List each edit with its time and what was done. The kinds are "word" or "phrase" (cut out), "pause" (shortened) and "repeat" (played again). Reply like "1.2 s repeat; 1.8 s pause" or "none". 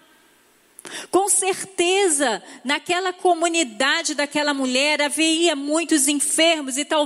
none